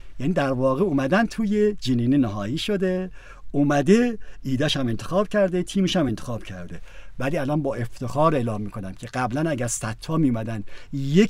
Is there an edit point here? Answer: no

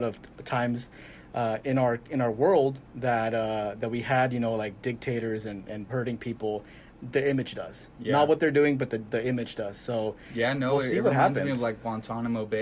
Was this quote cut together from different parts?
yes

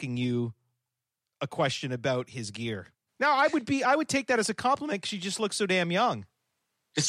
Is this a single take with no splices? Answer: no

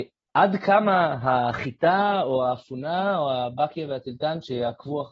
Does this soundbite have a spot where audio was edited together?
no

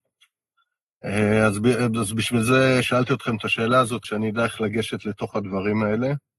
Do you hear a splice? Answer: yes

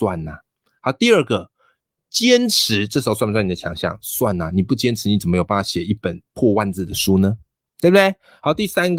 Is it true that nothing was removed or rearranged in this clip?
yes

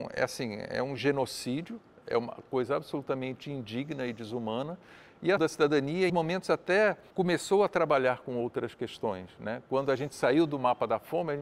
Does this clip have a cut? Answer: yes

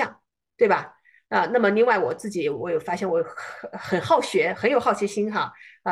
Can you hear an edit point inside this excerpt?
no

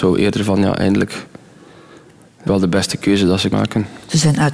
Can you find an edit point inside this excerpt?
yes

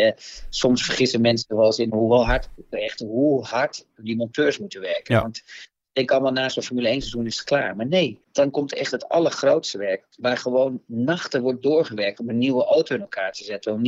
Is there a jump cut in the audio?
yes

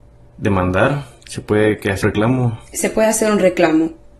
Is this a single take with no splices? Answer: no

